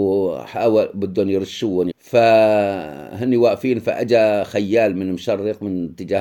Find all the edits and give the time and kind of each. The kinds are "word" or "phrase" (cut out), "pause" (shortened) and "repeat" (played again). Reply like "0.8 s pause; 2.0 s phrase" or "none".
1.9 s word